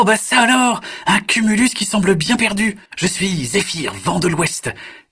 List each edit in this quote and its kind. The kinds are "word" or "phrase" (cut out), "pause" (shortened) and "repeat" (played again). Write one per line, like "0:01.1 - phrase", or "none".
0:02.9 - pause